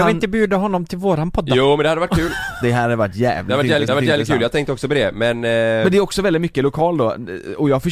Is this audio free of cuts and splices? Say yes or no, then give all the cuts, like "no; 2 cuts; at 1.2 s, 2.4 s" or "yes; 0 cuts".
no; 1 cut; at 3.9 s